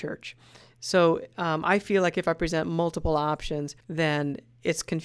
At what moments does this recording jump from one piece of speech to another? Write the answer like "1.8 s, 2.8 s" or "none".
3.8 s